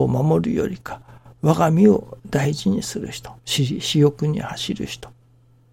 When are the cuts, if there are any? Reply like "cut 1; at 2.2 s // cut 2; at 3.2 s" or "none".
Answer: cut 1; at 3.4 s

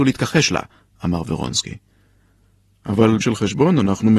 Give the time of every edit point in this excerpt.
cut 1; at 3.2 s

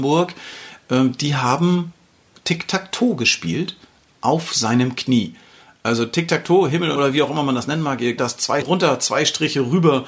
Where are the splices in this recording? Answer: cut 1; at 7.0 s // cut 2; at 8.2 s // cut 3; at 8.6 s

